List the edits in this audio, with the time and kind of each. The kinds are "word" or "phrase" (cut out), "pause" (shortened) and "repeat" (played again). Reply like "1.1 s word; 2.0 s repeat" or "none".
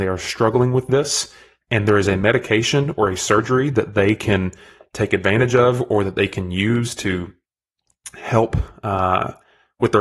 none